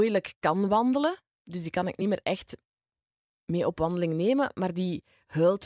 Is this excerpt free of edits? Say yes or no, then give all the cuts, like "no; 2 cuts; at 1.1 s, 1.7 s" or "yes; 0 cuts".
yes; 0 cuts